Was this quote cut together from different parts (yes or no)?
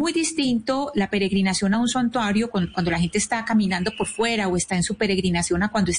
no